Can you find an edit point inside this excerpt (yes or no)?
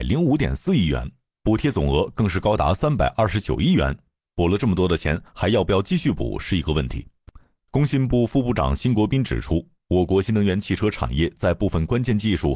no